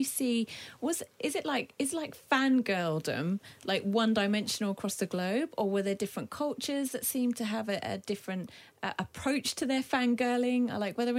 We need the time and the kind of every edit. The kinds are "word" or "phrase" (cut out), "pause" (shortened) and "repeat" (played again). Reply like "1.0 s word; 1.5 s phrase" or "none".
none